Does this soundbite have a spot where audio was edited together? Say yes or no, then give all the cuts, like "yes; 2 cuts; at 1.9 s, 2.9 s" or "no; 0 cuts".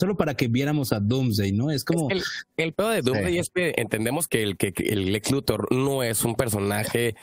yes; 1 cut; at 4.3 s